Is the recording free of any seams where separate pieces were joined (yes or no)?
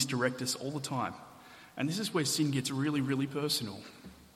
yes